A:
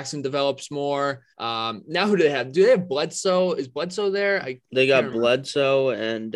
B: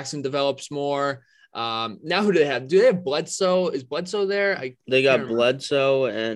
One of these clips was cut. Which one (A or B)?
A